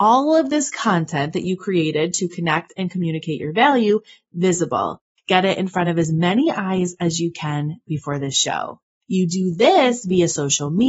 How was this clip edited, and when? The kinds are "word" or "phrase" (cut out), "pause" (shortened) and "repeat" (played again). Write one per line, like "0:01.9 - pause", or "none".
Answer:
none